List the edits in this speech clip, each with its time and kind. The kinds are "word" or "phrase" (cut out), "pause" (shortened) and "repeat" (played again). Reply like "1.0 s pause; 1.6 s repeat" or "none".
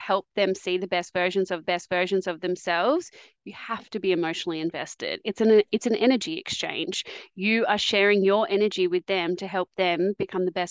1.6 s repeat